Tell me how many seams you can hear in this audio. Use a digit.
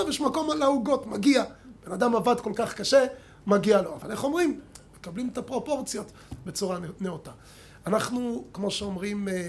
0